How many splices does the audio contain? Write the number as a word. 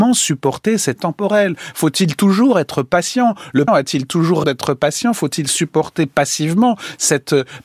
three